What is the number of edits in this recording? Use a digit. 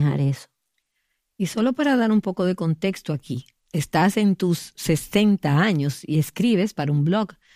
0